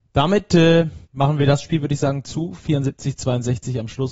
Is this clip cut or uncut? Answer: cut